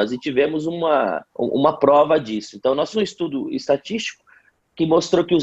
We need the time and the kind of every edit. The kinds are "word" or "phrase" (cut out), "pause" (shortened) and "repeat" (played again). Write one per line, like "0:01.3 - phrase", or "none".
0:01.3 - pause
0:02.9 - word